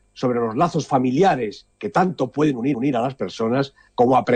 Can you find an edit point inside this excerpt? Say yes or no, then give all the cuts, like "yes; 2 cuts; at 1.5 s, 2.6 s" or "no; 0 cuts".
yes; 2 cuts; at 1.7 s, 2.7 s